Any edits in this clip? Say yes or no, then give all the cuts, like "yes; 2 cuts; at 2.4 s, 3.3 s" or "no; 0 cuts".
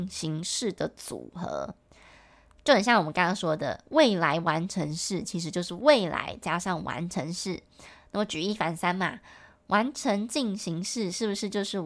no; 0 cuts